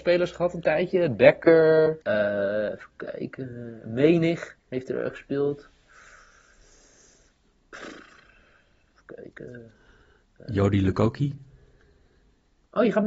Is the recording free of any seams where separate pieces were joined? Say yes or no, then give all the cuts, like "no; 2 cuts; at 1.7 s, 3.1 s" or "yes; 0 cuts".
no; 2 cuts; at 2.0 s, 4.6 s